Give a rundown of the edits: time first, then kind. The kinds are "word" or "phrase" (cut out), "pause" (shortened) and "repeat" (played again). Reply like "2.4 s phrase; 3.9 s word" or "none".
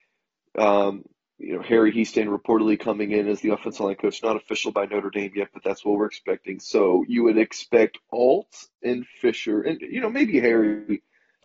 none